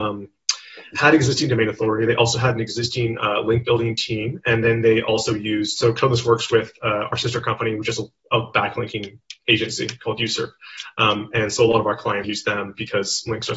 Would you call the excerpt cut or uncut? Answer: cut